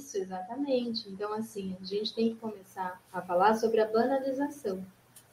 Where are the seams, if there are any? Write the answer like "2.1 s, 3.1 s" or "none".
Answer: 3.0 s